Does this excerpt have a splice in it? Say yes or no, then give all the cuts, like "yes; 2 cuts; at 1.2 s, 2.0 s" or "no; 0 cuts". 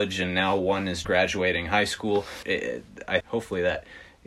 yes; 3 cuts; at 1.0 s, 2.4 s, 3.2 s